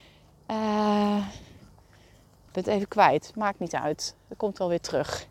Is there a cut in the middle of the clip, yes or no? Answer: yes